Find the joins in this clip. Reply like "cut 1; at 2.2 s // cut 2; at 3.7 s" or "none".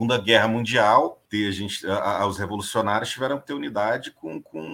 cut 1; at 1.3 s